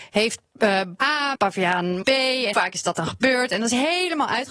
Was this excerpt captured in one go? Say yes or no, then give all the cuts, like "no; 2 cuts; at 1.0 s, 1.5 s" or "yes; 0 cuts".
no; 4 cuts; at 1.0 s, 1.3 s, 2.0 s, 2.5 s